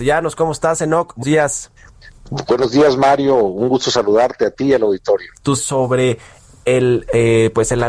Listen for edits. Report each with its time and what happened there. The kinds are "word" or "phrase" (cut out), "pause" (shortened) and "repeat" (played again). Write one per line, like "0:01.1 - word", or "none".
0:01.2 - word
0:05.6 - word